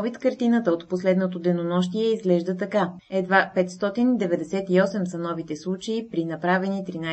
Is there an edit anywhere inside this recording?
no; 0 cuts

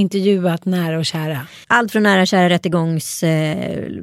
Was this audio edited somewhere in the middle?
yes; 1 cut; at 1.6 s

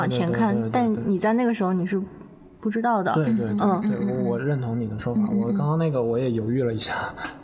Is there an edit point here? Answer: no; 0 cuts

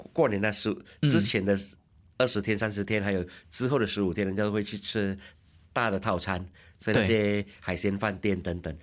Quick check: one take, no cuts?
yes; 0 cuts

